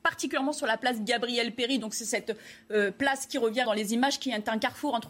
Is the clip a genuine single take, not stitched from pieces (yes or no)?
no